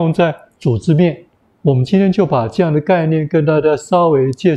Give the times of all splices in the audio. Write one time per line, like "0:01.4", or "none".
none

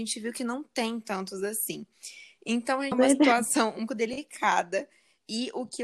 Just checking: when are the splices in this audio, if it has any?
0:02.9
0:03.9

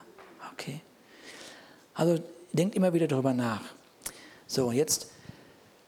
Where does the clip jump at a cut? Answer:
none

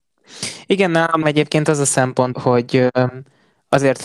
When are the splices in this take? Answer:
0:01.2
0:02.3

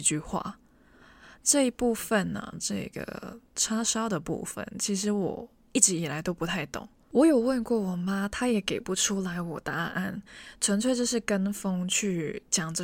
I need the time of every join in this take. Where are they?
0:02.5

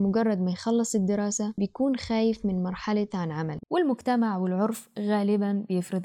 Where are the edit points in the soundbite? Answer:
0:03.1

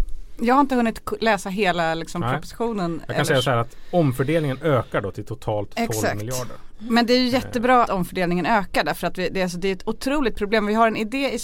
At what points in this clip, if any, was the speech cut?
0:07.9

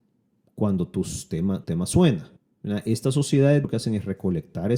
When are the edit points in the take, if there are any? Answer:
0:01.6
0:02.4
0:03.6

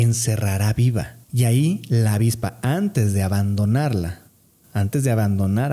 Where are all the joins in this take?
0:01.2

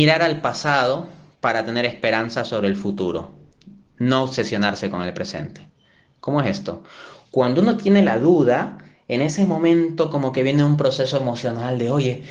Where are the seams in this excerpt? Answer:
none

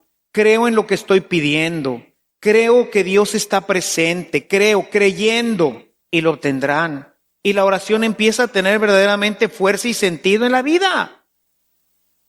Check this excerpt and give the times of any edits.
none

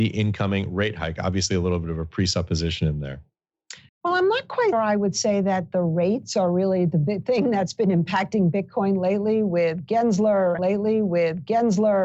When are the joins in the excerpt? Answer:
0:03.9
0:04.7
0:10.6

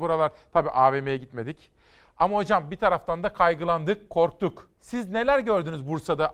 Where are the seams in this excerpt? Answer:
0:04.7

